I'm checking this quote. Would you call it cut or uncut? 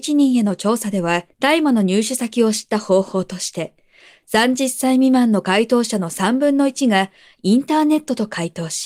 cut